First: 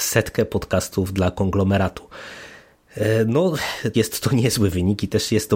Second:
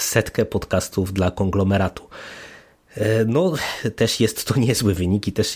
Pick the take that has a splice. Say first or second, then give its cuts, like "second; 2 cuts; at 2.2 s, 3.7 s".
first; 1 cut; at 3.9 s